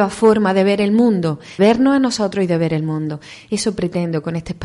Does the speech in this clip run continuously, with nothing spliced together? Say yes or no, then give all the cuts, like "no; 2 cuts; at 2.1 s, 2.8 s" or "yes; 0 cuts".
no; 1 cut; at 1.6 s